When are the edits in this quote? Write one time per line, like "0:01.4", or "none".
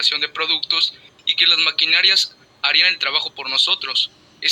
none